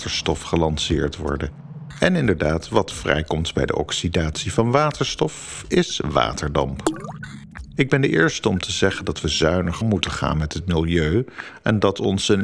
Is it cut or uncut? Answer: cut